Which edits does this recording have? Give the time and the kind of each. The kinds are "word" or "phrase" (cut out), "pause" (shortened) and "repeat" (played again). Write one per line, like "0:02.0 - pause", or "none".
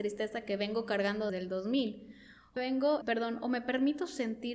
0:01.3 - word
0:02.6 - word
0:03.0 - word